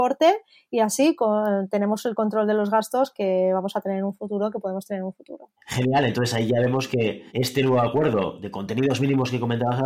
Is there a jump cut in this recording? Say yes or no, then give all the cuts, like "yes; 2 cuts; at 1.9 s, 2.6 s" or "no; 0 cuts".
yes; 2 cuts; at 5.6 s, 7.3 s